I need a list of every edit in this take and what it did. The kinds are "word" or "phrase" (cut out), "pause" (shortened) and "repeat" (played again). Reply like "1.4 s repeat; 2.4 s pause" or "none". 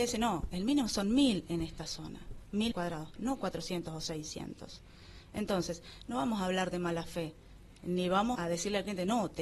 2.7 s word; 8.4 s word